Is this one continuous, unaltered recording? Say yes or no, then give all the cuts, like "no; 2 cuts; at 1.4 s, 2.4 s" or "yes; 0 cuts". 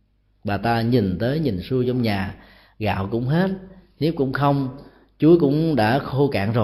yes; 0 cuts